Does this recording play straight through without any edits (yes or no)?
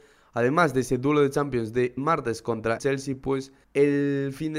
no